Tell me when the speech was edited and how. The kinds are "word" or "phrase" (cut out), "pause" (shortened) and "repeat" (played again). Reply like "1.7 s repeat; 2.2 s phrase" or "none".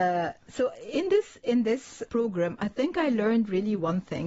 2.1 s word